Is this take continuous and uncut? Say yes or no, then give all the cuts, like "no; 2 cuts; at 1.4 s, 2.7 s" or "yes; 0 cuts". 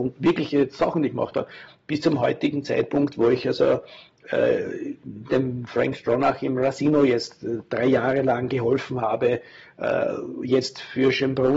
yes; 0 cuts